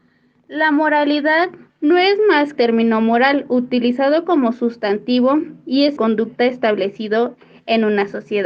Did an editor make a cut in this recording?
yes; 3 cuts; at 1.7 s, 2.6 s, 6.0 s

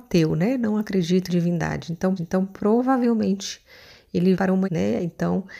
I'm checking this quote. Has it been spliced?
yes; 4 cuts; at 1.3 s, 2.2 s, 4.3 s, 4.6 s

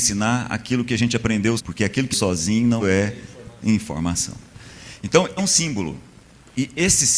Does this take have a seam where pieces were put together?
yes; 4 cuts; at 1.6 s, 2.1 s, 2.8 s, 5.4 s

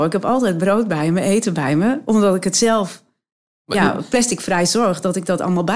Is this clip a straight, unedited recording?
yes; 0 cuts

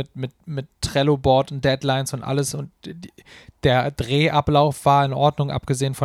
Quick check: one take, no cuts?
yes; 0 cuts

